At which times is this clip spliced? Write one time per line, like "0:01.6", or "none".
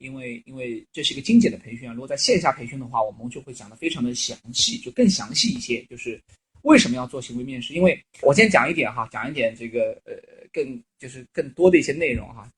0:08.2

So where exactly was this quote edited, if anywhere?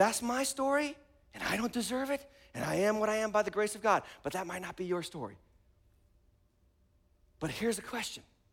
none

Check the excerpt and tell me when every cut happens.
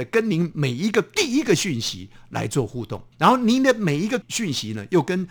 0:03.1

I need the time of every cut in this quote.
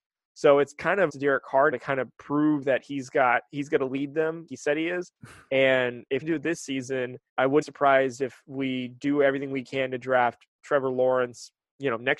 0:01.1
0:01.7
0:04.5
0:05.2
0:06.2
0:07.3
0:07.6

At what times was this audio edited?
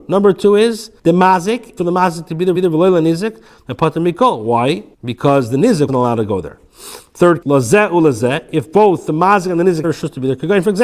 0:01.0
0:01.8
0:02.5
0:04.9
0:05.9
0:07.4
0:09.8

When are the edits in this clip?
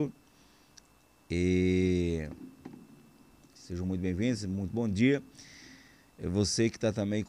none

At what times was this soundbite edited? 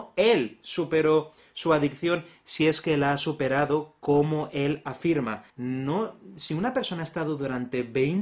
0:05.5

